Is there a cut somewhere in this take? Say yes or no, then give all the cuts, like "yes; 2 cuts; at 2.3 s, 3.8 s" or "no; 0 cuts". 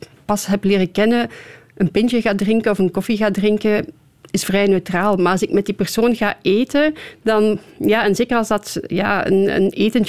no; 0 cuts